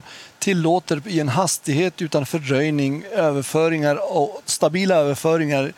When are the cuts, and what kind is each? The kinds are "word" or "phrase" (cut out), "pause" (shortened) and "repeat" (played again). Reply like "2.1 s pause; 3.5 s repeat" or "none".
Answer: none